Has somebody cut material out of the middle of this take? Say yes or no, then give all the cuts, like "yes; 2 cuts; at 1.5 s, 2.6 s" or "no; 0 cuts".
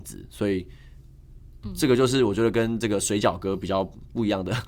no; 0 cuts